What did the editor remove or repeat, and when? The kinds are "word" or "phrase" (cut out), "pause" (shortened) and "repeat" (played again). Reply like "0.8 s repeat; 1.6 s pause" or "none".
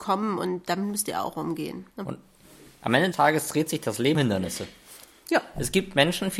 1.9 s pause; 3.1 s word; 4.1 s word